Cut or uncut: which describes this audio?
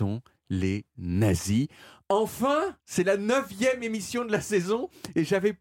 cut